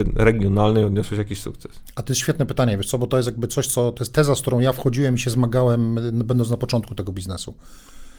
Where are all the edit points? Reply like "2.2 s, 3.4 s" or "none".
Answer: none